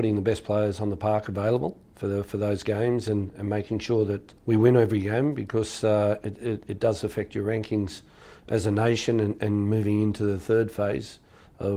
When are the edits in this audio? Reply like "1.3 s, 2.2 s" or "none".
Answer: 4.4 s